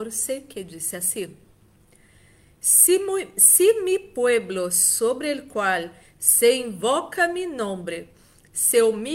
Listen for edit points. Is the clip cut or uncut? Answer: uncut